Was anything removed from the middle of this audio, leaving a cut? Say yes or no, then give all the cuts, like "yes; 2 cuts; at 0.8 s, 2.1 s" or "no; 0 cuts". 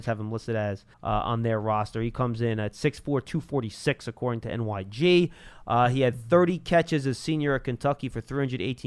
yes; 1 cut; at 0.9 s